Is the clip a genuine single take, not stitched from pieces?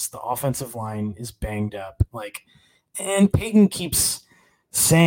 yes; 0 cuts

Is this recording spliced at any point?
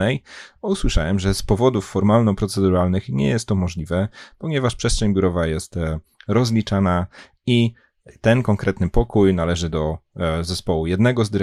no; 0 cuts

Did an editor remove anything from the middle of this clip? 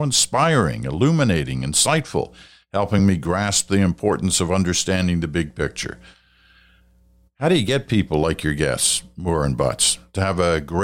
no; 0 cuts

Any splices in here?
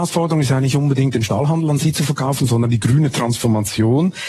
no; 0 cuts

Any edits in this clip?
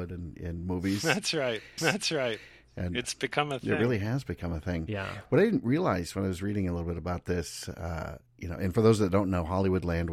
yes; 2 cuts; at 1.8 s, 8.3 s

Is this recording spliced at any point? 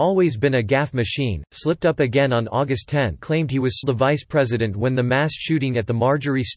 yes; 2 cuts; at 3.2 s, 3.8 s

